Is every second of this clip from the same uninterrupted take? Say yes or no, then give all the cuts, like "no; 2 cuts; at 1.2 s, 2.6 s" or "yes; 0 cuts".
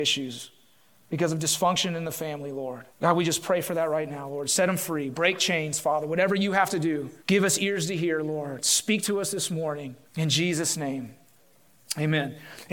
no; 3 cuts; at 2.9 s, 7.2 s, 10.0 s